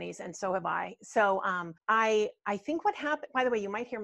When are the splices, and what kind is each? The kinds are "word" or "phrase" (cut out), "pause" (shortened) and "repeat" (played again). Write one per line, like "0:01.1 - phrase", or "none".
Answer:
0:01.8 - pause